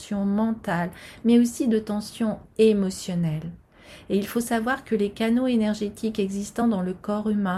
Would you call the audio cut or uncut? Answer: uncut